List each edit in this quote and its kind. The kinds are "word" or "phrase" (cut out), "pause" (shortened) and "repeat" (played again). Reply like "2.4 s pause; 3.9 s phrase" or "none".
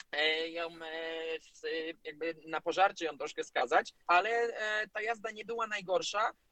4.0 s pause